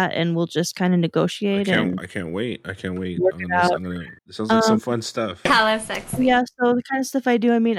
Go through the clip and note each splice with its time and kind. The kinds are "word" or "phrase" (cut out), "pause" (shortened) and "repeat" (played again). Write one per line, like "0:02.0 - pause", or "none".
0:04.2 - pause